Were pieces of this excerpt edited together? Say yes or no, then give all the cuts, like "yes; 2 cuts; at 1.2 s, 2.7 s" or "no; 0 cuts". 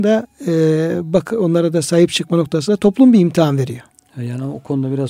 no; 0 cuts